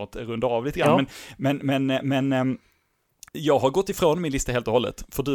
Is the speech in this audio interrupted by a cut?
yes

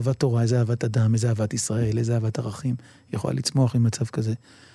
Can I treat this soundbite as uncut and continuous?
yes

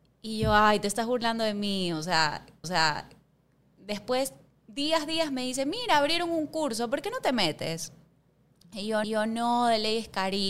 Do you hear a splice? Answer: yes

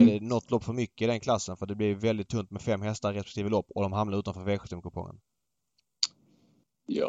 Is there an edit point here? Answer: no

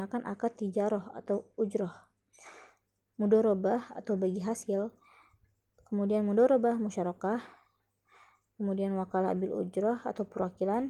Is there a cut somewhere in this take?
no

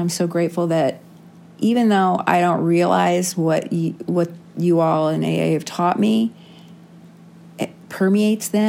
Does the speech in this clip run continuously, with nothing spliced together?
yes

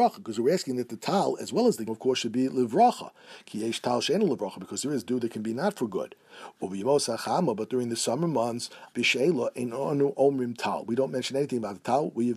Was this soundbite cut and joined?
yes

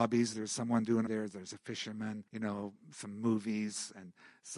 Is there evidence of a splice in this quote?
yes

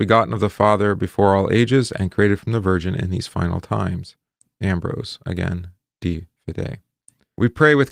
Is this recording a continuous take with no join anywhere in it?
yes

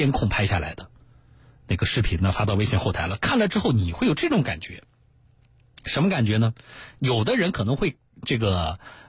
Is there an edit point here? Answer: no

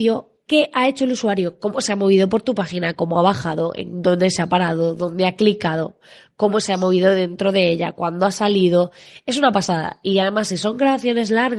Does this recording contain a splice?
no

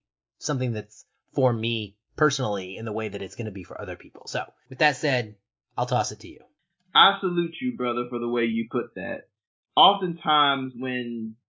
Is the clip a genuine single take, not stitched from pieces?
yes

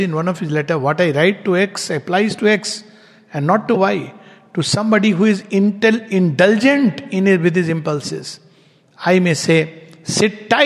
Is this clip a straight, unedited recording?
yes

